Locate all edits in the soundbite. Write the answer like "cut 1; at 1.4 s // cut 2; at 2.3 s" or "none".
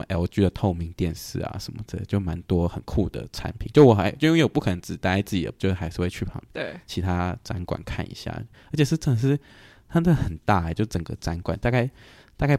cut 1; at 5.6 s

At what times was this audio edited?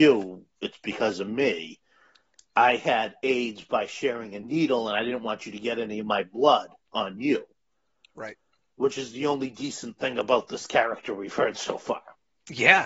none

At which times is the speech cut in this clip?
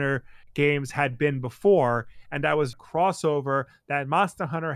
cut 1; at 2.7 s

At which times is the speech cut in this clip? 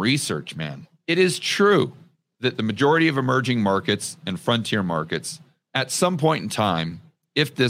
none

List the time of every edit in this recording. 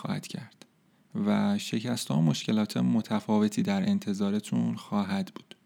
none

